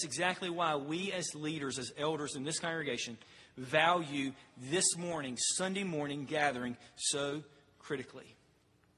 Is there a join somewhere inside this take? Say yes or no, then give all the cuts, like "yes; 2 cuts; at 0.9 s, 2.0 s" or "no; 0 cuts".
no; 0 cuts